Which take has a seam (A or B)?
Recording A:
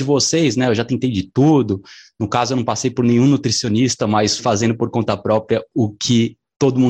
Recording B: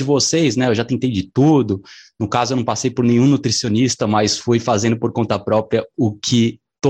A